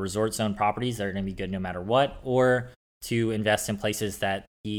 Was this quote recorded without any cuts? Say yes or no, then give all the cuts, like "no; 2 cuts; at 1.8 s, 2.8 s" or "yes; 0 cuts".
yes; 0 cuts